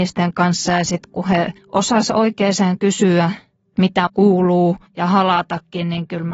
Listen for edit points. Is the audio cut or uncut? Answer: cut